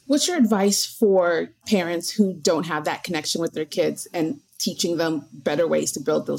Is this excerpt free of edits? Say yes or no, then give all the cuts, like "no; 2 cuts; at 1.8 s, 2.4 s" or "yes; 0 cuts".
no; 1 cut; at 4.5 s